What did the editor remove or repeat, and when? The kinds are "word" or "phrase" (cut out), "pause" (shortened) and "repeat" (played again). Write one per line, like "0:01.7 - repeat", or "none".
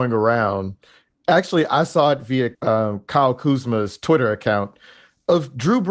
0:02.5 - pause